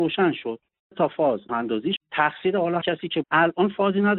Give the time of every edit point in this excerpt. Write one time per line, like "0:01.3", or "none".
0:00.9
0:01.5
0:02.0
0:02.8
0:03.2

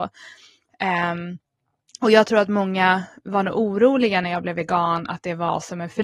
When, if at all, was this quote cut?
none

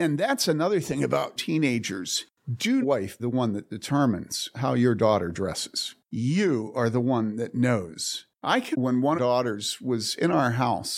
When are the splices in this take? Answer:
0:01.4
0:02.8
0:03.2
0:08.7
0:09.2

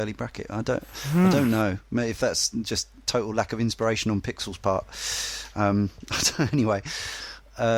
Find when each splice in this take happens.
none

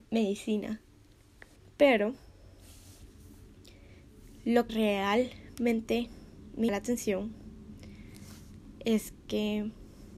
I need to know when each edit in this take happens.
0:01.6
0:04.7
0:06.7

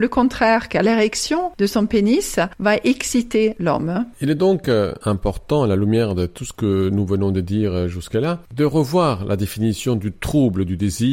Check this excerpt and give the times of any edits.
none

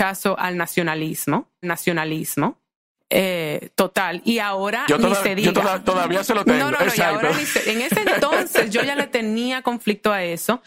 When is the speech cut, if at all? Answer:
0:01.6

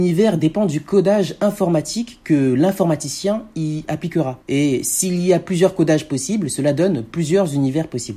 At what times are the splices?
0:04.4

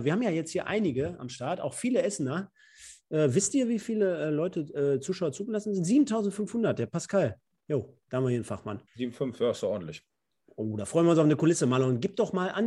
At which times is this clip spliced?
0:08.9

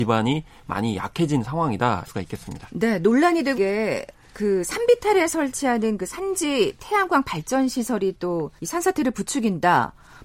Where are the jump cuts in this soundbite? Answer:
0:02.0
0:03.5
0:08.6

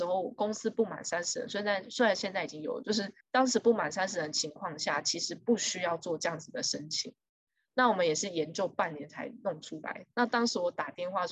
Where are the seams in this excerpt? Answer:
0:03.2

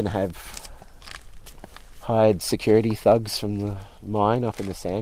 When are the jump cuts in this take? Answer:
none

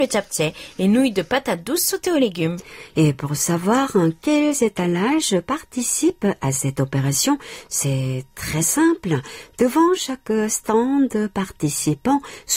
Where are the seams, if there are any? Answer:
none

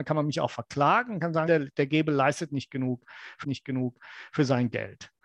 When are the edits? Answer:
0:01.5
0:03.4

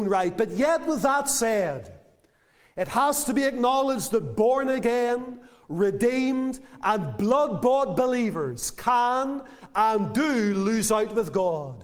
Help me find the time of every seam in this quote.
none

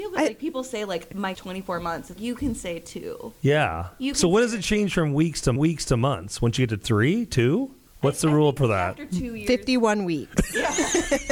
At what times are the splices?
0:01.3
0:02.2
0:05.6
0:07.9
0:08.6

